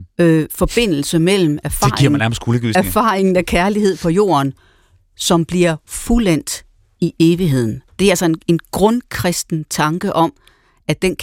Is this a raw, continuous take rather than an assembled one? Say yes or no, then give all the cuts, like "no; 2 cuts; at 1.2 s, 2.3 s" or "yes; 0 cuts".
yes; 0 cuts